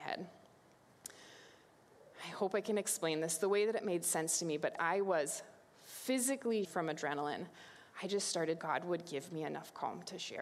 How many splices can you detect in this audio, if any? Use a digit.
5